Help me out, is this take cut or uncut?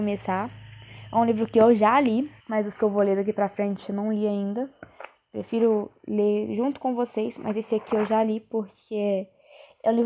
cut